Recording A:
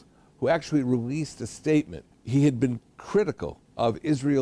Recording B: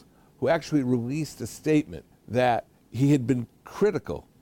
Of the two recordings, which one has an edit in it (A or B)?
A